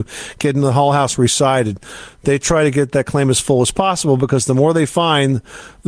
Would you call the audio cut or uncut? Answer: uncut